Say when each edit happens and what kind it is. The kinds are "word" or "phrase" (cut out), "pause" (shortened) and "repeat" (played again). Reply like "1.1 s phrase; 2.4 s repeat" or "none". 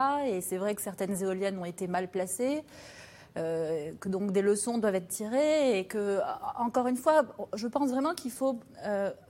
none